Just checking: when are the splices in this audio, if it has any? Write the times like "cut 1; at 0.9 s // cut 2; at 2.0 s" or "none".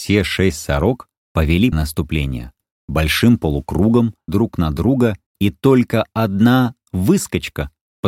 cut 1; at 1.7 s // cut 2; at 4.3 s // cut 3; at 5.3 s

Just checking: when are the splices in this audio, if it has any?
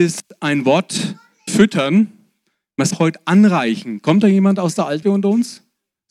cut 1; at 1.5 s // cut 2; at 2.9 s // cut 3; at 5.0 s

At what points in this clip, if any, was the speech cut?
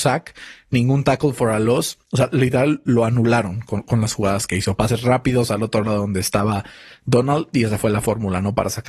none

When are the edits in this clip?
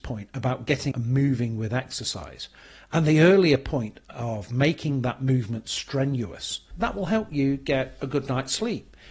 cut 1; at 0.9 s // cut 2; at 6.7 s

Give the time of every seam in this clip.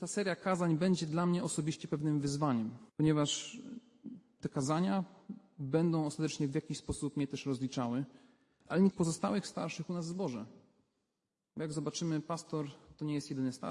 cut 1; at 2.9 s // cut 2; at 8.9 s

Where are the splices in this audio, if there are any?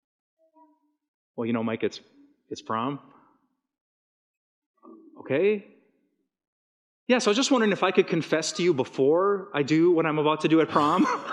none

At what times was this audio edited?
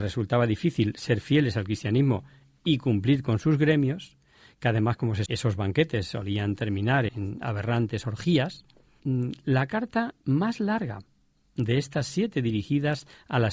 cut 1; at 5.3 s // cut 2; at 7.1 s // cut 3; at 9.0 s

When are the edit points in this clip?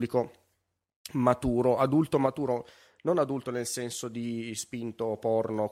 none

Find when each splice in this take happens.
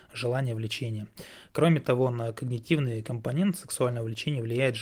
none

